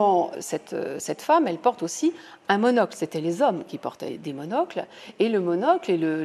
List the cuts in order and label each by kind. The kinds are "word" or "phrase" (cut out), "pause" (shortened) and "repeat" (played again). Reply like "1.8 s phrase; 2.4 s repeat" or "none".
none